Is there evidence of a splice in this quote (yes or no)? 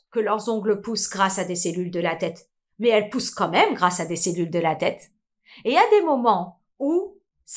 no